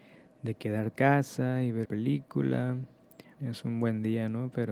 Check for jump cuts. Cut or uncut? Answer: cut